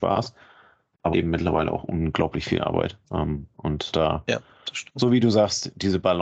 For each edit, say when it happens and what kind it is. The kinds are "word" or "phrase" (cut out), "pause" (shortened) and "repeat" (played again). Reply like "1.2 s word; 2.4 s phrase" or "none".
1.1 s word; 3.0 s pause; 3.9 s word